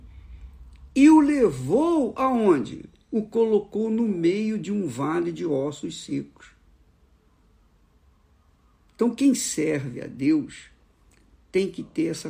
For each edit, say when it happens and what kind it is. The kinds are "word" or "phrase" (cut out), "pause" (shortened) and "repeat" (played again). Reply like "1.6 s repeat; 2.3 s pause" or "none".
none

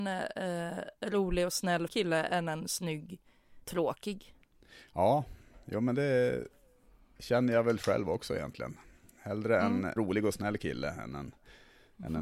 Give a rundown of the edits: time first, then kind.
1.9 s word; 3.6 s pause; 10.0 s word

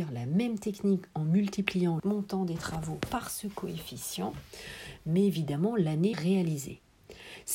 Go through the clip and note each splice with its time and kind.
2.0 s word; 6.1 s phrase

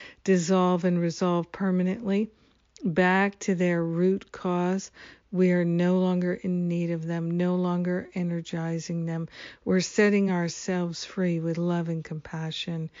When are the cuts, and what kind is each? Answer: none

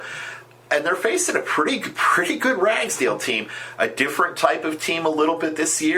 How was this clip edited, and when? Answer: none

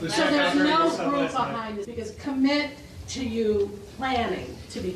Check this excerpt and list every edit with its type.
1.8 s word

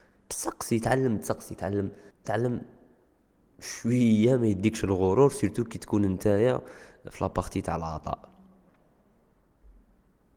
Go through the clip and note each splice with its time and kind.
2.1 s pause

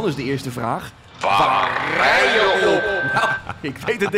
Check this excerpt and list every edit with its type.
none

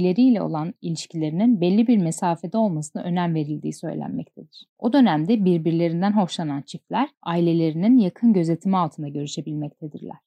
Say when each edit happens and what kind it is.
4.7 s pause; 7.1 s pause

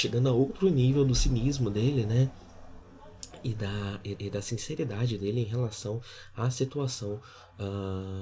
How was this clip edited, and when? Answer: 4.2 s repeat

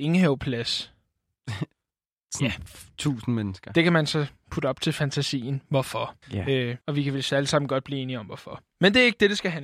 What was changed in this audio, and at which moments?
2.9 s pause; 6.2 s pause; 6.8 s pause

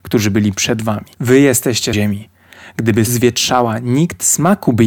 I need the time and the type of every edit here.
1.1 s pause; 1.9 s word; 3.1 s word

